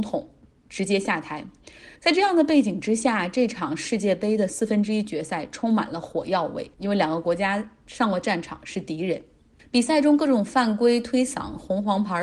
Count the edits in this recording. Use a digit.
3